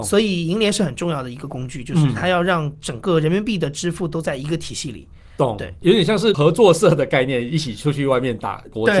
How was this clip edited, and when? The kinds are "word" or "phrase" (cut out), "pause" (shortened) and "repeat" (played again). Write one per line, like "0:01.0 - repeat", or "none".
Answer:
none